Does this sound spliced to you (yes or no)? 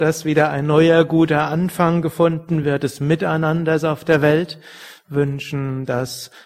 no